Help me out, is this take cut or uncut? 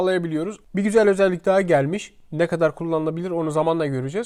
uncut